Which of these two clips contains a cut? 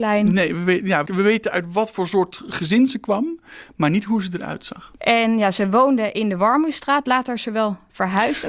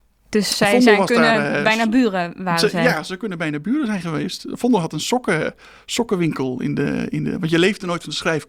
first; 2 cuts; at 1.0 s, 5.0 s

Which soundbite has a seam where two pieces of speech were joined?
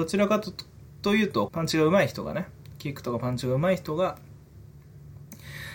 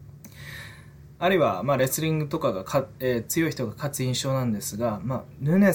first; 1 cut; at 1.5 s

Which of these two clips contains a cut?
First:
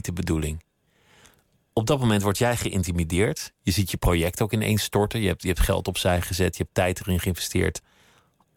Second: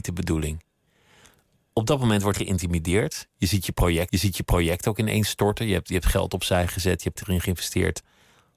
second; 3 cuts; at 2.3 s, 4.1 s, 7.2 s

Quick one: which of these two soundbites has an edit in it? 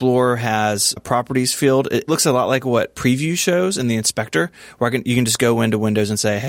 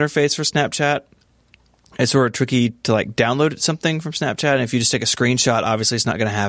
first; 2 cuts; at 1.0 s, 2.1 s

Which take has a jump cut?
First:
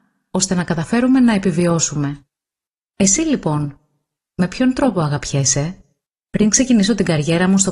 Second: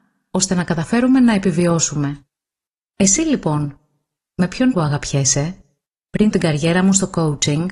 second; 2 cuts; at 4.7 s, 6.3 s

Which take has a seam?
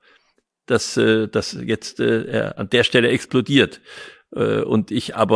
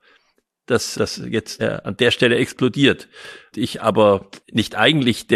second; 4 cuts; at 0.9 s, 1.6 s, 3.5 s, 4.4 s

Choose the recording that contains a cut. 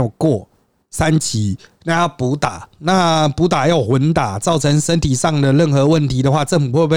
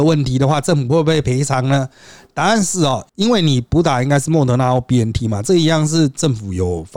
second; 1 cut; at 3.1 s

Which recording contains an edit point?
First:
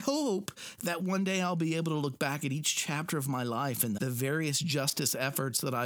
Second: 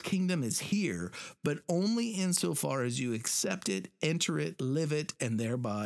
first; 1 cut; at 4.0 s

